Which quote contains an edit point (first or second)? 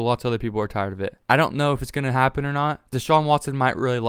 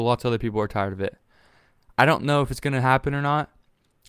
first